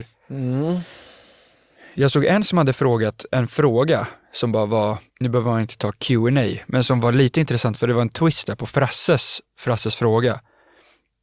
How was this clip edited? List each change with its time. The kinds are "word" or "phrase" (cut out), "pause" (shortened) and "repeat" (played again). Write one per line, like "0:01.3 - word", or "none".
0:05.1 - pause